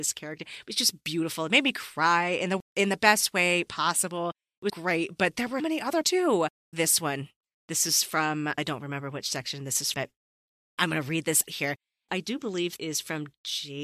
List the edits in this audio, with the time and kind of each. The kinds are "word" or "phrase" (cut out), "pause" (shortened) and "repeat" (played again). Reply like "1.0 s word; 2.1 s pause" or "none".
4.7 s word; 5.6 s word; 6.0 s word; 6.7 s word; 8.6 s word; 9.9 s word; 11.5 s word; 12.8 s word